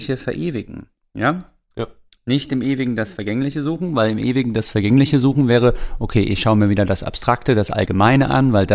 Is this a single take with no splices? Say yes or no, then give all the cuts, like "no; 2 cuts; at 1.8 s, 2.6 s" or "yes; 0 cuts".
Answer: yes; 0 cuts